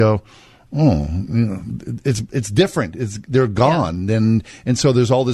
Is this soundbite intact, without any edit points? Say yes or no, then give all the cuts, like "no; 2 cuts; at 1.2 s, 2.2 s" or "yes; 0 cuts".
yes; 0 cuts